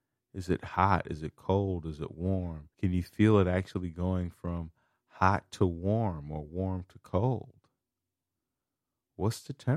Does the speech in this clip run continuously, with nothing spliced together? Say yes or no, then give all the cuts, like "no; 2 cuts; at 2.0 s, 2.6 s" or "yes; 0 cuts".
no; 1 cut; at 2.7 s